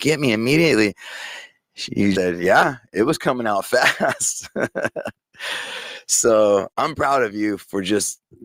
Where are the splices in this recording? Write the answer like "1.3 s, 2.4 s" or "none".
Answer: 2.1 s, 6.7 s

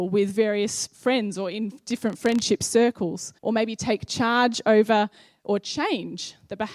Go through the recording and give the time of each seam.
3.4 s

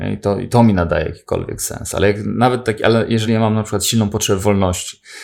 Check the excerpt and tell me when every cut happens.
none

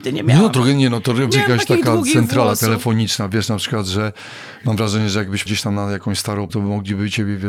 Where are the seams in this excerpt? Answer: 1.3 s, 5.5 s, 6.5 s

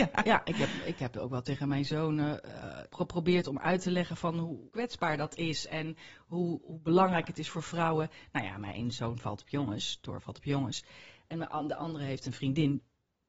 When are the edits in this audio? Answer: 2.9 s, 4.7 s

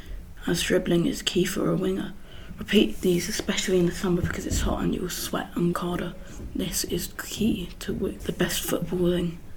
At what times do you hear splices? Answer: 5.7 s, 8.2 s

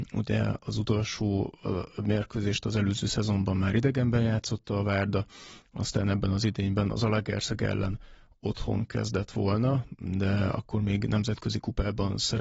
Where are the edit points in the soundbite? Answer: none

